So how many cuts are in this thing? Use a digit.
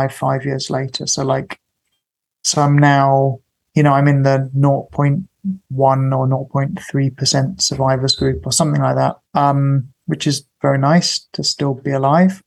1